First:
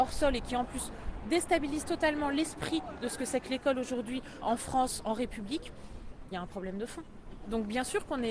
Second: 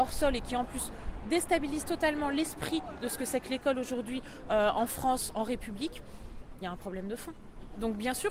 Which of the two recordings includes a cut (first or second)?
first